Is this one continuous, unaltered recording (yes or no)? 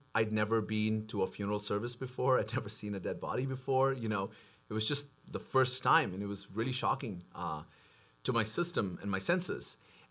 yes